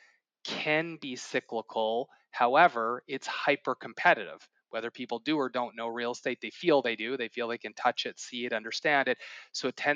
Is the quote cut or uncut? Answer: uncut